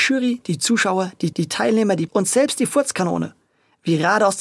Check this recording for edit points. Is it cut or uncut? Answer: cut